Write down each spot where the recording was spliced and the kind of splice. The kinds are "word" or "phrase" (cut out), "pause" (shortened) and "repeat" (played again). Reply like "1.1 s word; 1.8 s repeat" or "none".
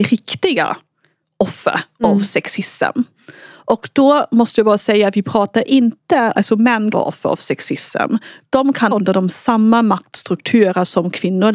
6.3 s word; 6.9 s word; 8.9 s word